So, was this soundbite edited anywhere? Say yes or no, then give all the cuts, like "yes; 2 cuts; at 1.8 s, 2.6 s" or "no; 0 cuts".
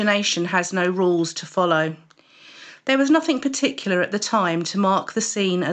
no; 0 cuts